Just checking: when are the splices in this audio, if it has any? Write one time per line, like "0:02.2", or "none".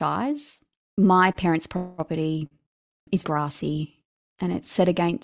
0:03.2